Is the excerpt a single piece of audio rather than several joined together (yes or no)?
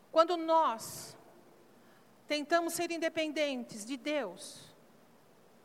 yes